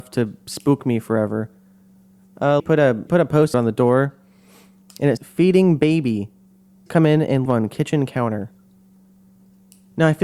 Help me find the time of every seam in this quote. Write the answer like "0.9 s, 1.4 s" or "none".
2.6 s, 3.1 s, 3.5 s, 5.2 s, 6.9 s, 7.5 s